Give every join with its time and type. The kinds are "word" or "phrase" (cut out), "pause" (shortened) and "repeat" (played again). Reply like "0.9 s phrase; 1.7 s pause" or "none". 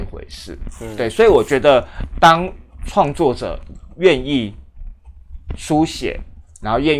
2.1 s word